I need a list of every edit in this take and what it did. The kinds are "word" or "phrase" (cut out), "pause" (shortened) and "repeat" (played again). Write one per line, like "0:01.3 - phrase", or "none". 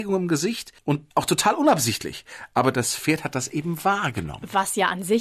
0:01.1 - pause